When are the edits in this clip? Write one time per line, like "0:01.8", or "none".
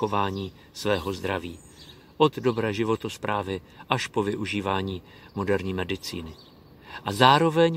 none